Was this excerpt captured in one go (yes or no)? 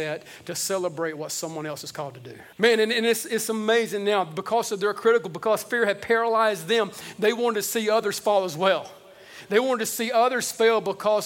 no